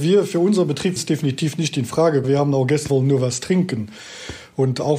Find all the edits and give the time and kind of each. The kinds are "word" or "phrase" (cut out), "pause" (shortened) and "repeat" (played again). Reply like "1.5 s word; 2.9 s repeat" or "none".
1.0 s word; 2.2 s phrase; 2.9 s phrase